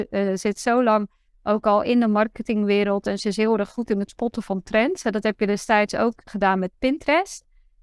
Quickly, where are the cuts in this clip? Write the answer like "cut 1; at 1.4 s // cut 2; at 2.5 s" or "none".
cut 1; at 6.3 s

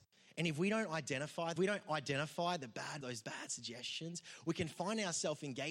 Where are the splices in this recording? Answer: cut 1; at 1.6 s // cut 2; at 3.0 s

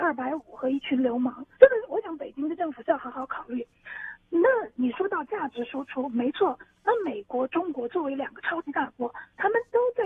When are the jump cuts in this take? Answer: cut 1; at 1.5 s

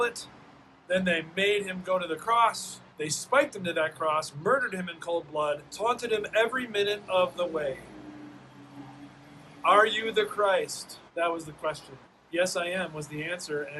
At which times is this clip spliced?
cut 1; at 2.9 s // cut 2; at 5.7 s // cut 3; at 11.1 s // cut 4; at 12.0 s

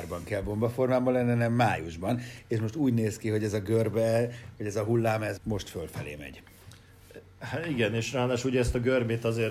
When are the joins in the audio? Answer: cut 1; at 5.4 s

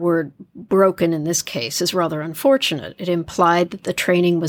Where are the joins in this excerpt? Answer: none

